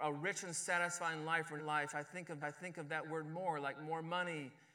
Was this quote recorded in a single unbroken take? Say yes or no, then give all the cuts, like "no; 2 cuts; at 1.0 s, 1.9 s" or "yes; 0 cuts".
no; 2 cuts; at 1.6 s, 2.4 s